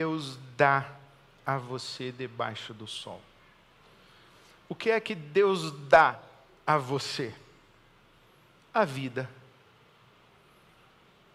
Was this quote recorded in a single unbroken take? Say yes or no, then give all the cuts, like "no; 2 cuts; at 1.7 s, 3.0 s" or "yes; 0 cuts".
yes; 0 cuts